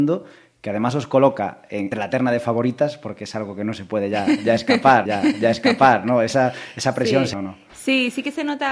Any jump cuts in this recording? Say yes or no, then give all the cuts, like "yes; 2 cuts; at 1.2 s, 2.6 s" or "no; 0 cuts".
yes; 3 cuts; at 1.9 s, 5.1 s, 7.3 s